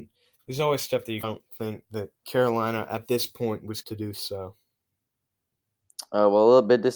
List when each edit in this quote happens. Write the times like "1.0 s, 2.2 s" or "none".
1.2 s, 2.2 s, 3.8 s